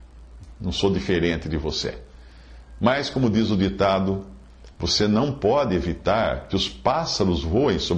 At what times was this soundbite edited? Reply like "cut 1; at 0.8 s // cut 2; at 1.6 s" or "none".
none